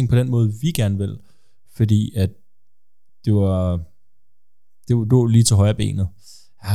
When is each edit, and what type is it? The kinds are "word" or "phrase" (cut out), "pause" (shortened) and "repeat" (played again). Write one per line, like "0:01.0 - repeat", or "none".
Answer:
none

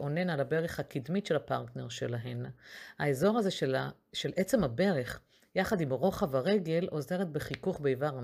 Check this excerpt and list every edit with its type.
none

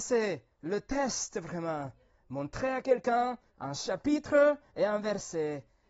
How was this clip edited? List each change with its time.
0:03.5 - pause

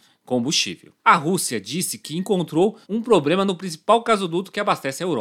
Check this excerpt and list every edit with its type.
0:01.0 - pause
0:02.8 - pause

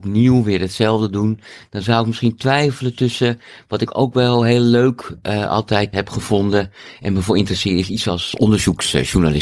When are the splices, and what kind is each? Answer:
none

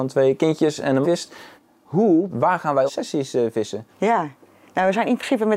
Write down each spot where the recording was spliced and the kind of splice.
0:01.0 - phrase
0:02.3 - phrase
0:02.9 - word
0:03.9 - pause

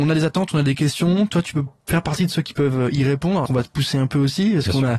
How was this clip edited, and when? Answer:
0:03.5 - word

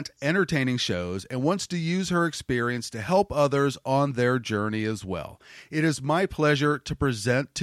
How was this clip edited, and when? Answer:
none

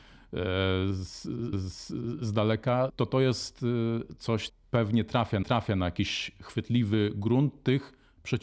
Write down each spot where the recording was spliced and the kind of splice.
0:01.5 - repeat
0:02.9 - word
0:04.5 - word
0:05.4 - repeat

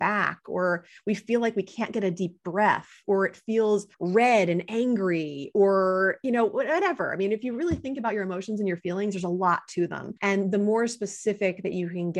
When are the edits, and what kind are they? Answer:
0:03.9 - pause
0:10.2 - pause

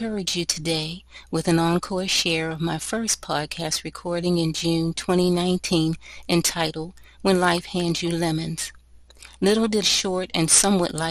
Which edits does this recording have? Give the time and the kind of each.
0:09.8 - phrase

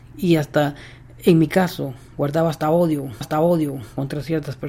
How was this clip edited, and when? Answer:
0:03.2 - repeat

